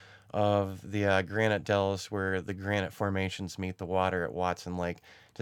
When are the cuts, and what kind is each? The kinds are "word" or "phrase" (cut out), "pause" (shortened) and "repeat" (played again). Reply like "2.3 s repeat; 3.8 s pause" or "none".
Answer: none

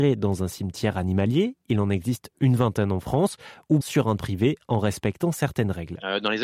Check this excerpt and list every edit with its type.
3.8 s word; 4.2 s word

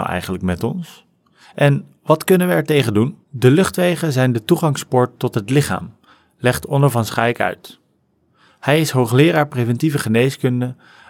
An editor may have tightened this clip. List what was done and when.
3.2 s pause

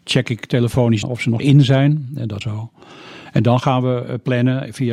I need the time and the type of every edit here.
1.0 s word; 1.4 s word; 2.4 s phrase

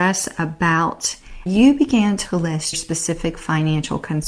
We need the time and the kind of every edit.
1.5 s word; 2.7 s word

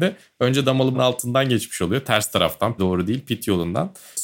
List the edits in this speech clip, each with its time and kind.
0.9 s word; 2.8 s word

